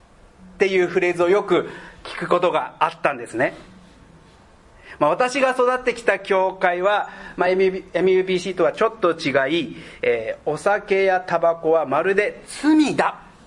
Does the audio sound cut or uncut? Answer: uncut